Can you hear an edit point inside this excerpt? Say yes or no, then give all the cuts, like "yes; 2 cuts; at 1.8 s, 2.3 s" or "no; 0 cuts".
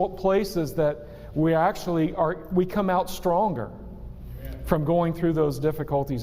no; 0 cuts